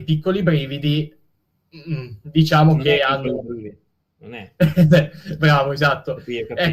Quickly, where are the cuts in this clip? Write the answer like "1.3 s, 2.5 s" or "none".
none